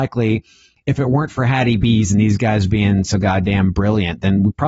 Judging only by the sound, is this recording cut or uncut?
uncut